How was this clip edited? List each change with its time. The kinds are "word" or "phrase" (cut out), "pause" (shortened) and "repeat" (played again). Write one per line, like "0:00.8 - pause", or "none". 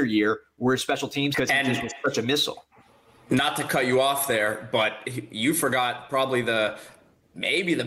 0:01.3 - word